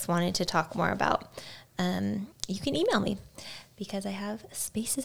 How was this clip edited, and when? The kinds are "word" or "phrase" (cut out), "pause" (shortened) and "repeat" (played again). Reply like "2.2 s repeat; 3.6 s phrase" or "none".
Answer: none